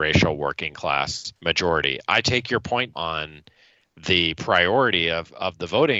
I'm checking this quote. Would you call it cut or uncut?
cut